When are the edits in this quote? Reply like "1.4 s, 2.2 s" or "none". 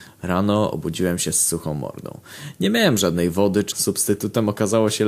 3.7 s